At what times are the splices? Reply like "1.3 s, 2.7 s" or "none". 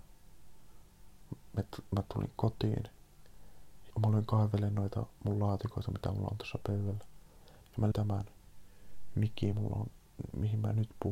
3.9 s, 7.9 s, 9.5 s